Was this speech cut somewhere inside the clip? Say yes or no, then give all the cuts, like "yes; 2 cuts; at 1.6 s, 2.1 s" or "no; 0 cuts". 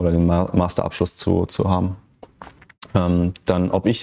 no; 0 cuts